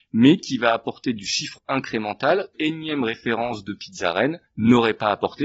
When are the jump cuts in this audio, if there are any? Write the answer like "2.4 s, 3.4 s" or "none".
1.6 s, 2.5 s, 4.5 s